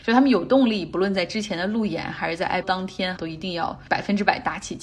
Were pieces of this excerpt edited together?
yes; 2 cuts; at 2.6 s, 3.2 s

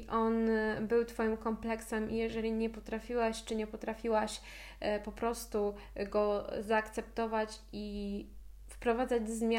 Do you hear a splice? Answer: no; 0 cuts

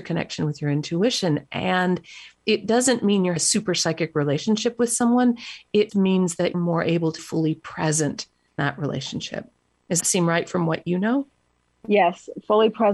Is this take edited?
yes; 6 cuts; at 3.4 s, 5.9 s, 6.5 s, 7.2 s, 8.6 s, 10.0 s

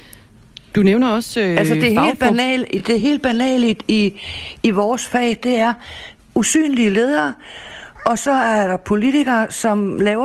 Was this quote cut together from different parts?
no; 0 cuts

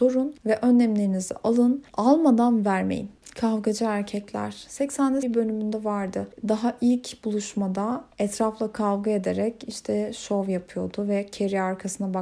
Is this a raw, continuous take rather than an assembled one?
no; 1 cut; at 5.2 s

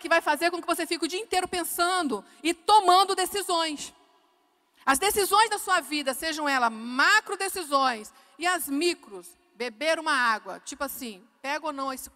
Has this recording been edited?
no; 0 cuts

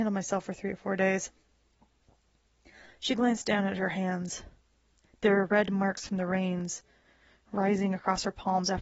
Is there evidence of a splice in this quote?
no; 0 cuts

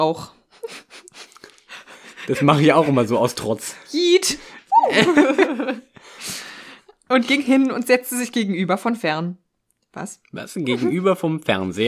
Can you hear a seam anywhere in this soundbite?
no; 0 cuts

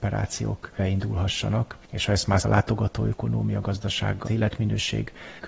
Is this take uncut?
no; 3 cuts; at 1.8 s, 2.4 s, 4.3 s

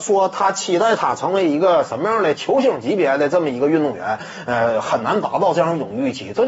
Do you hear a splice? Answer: no; 0 cuts

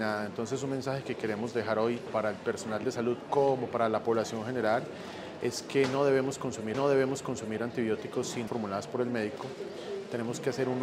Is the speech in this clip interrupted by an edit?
yes; 3 cuts; at 2.1 s, 6.7 s, 8.5 s

